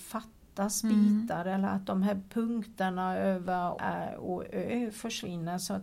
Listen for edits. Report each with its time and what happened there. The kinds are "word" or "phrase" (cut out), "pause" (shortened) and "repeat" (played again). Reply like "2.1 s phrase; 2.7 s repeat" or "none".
3.8 s word